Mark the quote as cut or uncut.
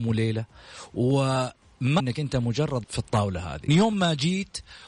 cut